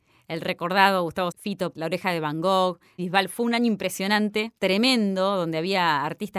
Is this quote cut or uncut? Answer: cut